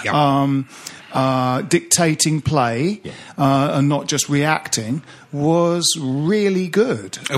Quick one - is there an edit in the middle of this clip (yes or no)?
no